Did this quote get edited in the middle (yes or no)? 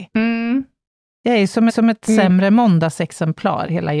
yes